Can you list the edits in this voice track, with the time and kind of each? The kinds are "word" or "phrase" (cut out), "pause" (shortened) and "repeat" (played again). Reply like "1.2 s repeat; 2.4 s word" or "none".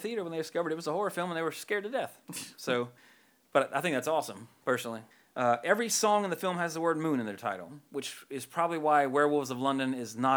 3.0 s pause; 5.1 s pause